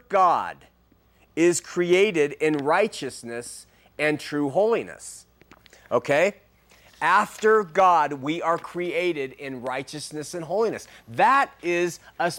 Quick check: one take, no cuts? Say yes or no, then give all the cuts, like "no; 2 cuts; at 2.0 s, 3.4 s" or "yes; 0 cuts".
yes; 0 cuts